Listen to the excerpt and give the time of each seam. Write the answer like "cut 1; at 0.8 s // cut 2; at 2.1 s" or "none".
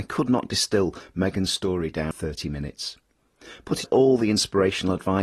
cut 1; at 2.1 s // cut 2; at 3.8 s